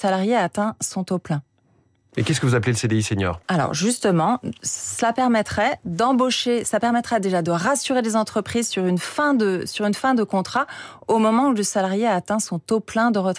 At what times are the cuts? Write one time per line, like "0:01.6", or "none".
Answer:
0:03.4